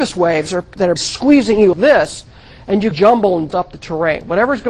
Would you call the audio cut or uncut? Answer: cut